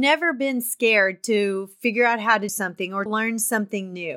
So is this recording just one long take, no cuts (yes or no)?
no